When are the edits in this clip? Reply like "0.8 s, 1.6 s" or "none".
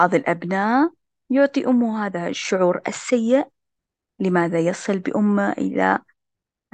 none